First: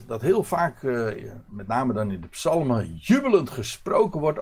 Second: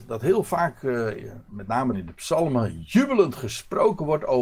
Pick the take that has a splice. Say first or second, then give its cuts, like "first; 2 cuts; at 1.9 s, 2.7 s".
second; 1 cut; at 1.9 s